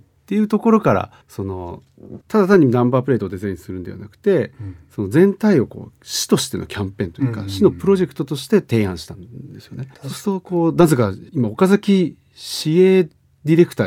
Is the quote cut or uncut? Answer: cut